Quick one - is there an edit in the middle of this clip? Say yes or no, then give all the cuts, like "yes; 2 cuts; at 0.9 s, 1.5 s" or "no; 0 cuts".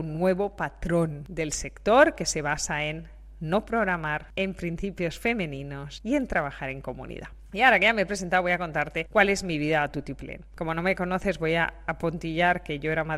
no; 0 cuts